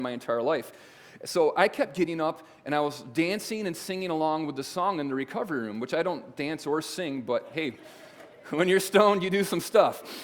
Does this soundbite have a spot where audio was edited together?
no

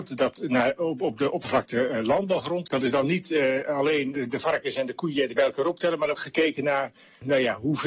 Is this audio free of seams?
no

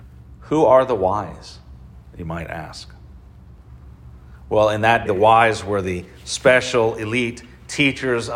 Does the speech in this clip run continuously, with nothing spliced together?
no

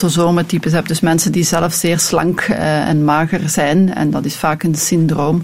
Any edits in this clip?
no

